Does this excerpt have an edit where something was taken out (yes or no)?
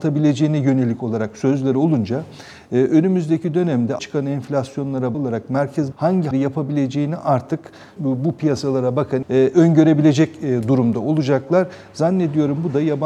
yes